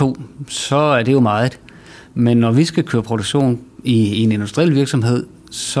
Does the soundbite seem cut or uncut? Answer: uncut